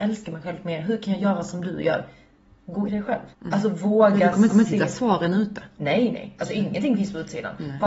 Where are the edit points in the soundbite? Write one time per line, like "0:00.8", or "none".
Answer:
0:02.9
0:03.3
0:04.5